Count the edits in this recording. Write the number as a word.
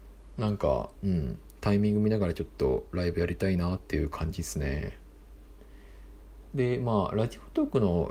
one